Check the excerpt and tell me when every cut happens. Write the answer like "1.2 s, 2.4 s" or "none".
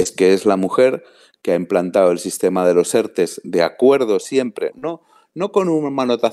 4.7 s